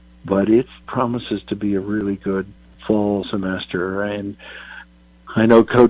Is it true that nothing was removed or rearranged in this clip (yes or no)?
yes